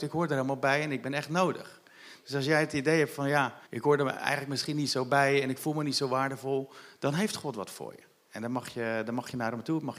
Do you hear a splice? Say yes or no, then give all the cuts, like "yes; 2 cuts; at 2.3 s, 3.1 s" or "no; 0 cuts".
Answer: yes; 2 cuts; at 3.7 s, 8.1 s